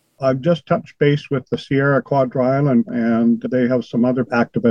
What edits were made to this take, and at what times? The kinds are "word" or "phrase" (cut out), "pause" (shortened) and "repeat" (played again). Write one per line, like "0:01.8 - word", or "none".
0:02.0 - word
0:02.9 - word